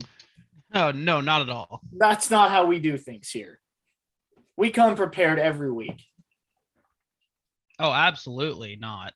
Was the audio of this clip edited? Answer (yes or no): no